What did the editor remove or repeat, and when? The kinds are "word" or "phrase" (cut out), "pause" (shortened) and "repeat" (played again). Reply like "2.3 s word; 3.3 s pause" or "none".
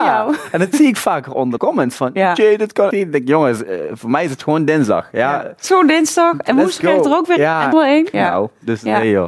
1.6 s word; 2.9 s word; 7.4 s word; 7.7 s phrase; 8.1 s word